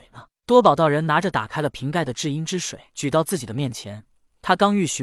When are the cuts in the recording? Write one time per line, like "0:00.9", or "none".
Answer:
0:02.9